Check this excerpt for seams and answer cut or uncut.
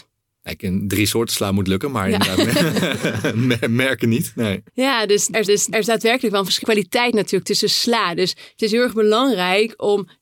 cut